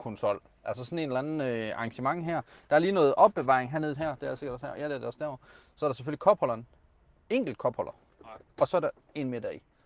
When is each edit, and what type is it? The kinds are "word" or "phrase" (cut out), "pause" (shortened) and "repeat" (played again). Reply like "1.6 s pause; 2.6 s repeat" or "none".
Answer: 4.0 s word